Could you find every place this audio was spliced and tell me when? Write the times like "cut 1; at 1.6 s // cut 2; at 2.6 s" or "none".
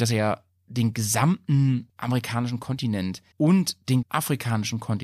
cut 1; at 1.9 s // cut 2; at 3.3 s // cut 3; at 4.0 s

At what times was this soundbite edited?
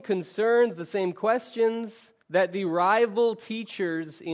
cut 1; at 2.2 s

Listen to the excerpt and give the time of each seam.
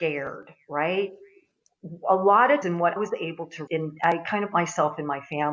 cut 1; at 2.6 s // cut 2; at 3.0 s // cut 3; at 3.7 s // cut 4; at 4.5 s

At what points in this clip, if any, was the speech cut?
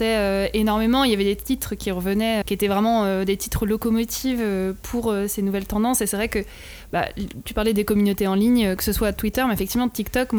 cut 1; at 2.4 s

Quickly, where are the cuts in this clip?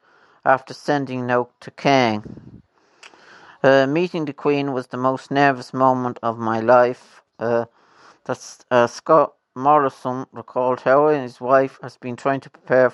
none

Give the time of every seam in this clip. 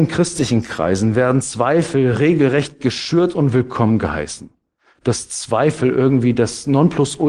none

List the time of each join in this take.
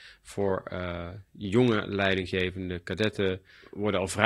none

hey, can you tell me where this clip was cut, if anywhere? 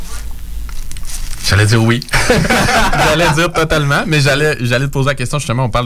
none

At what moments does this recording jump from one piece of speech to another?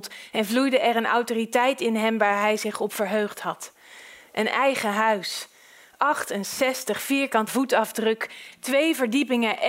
cut 1; at 7.5 s

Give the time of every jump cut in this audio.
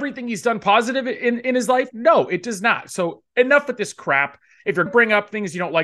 cut 1; at 3.3 s // cut 2; at 4.9 s

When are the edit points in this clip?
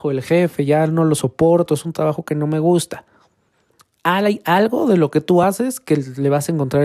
none

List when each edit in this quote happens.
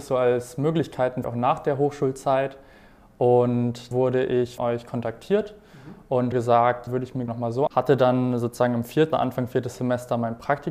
cut 1; at 1.2 s // cut 2; at 3.9 s // cut 3; at 4.6 s // cut 4; at 6.3 s // cut 5; at 6.9 s // cut 6; at 7.3 s // cut 7; at 7.7 s // cut 8; at 9.1 s

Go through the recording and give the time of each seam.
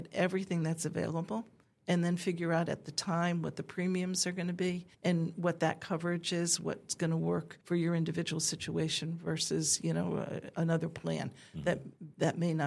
cut 1; at 4.9 s // cut 2; at 7.6 s

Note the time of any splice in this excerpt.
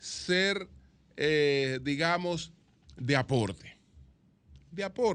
none

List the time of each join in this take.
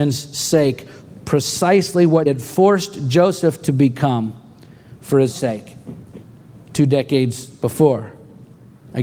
cut 1; at 2.3 s // cut 2; at 5.3 s

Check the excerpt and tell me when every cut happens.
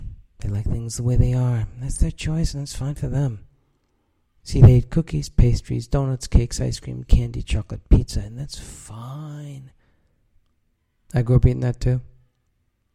cut 1; at 4.4 s

